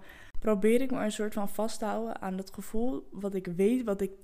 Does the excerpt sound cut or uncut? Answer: uncut